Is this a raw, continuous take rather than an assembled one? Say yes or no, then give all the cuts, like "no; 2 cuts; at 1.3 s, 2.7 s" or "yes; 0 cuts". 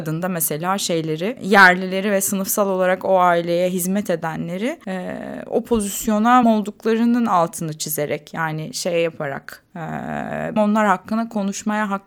no; 2 cuts; at 6.4 s, 10.6 s